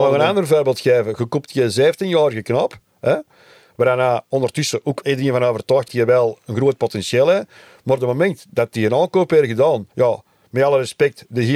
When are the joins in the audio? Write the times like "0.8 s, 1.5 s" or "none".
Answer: 5.0 s, 5.9 s, 6.4 s, 9.9 s

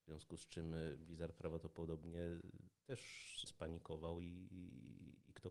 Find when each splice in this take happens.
3.5 s

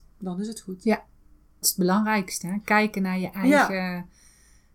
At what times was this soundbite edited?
1.6 s

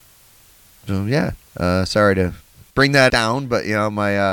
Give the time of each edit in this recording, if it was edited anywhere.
1.5 s, 2.7 s, 3.1 s

